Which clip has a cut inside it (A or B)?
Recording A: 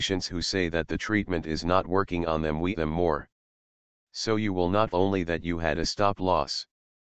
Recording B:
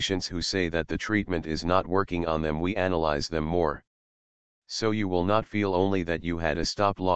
A